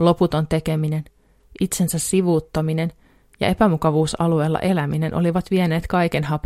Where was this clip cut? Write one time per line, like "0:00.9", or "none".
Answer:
none